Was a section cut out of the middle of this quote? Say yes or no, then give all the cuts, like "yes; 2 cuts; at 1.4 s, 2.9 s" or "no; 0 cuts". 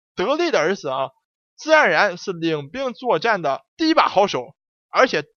yes; 1 cut; at 3.7 s